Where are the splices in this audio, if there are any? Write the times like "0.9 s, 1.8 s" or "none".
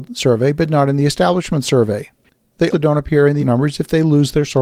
2.7 s, 3.4 s